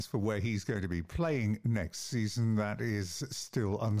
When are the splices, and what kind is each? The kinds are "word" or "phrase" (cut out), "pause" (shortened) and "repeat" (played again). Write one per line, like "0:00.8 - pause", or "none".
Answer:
none